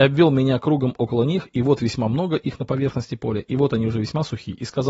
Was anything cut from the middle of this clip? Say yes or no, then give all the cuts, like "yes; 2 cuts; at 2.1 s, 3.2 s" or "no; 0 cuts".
no; 0 cuts